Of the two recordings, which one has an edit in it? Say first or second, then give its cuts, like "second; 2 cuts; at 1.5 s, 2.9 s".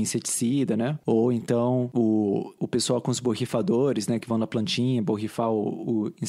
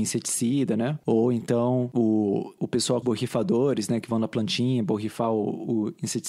second; 1 cut; at 3.0 s